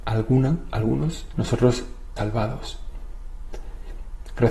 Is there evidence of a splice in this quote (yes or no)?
yes